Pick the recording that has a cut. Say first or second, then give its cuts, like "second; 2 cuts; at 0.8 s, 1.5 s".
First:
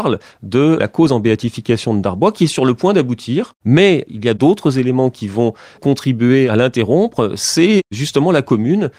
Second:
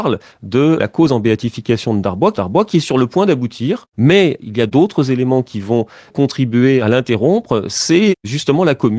second; 1 cut; at 2.4 s